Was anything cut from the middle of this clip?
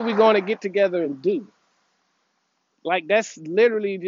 no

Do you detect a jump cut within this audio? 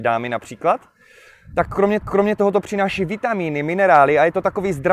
yes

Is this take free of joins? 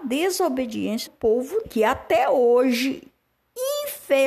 no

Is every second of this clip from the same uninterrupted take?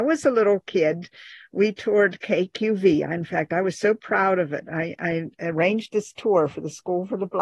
yes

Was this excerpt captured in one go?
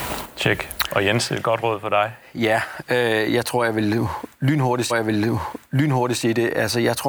no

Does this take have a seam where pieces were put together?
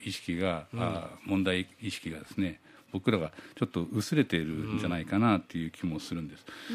yes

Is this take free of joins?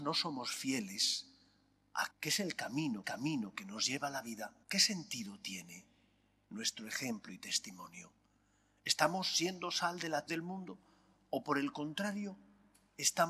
no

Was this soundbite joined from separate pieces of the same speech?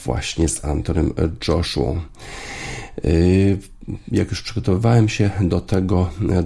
no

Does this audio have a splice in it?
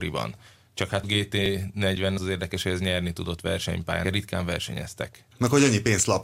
yes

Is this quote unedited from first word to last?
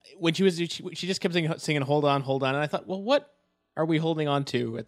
yes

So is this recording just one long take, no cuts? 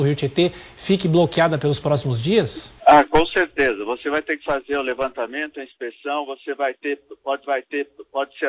no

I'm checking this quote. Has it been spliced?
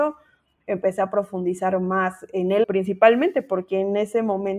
yes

